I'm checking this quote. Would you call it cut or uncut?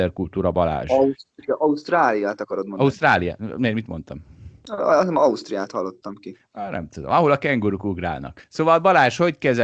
cut